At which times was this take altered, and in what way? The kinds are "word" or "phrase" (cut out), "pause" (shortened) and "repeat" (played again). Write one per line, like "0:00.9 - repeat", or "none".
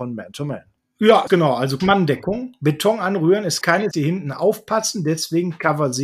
0:01.3 - word
0:01.8 - word
0:03.6 - word
0:03.9 - word